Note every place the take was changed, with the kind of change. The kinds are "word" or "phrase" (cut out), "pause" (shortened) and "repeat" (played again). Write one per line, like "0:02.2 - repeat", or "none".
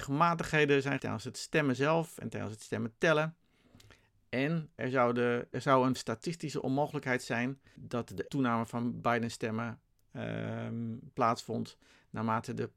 0:01.0 - word
0:04.8 - word
0:05.5 - word
0:06.0 - word
0:07.8 - word
0:08.3 - word